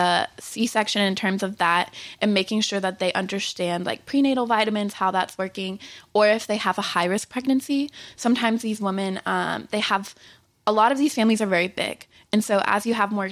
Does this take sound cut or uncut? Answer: uncut